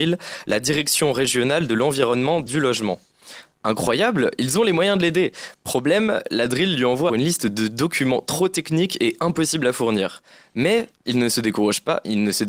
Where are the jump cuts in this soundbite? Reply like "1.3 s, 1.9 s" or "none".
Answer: 2.5 s, 7.1 s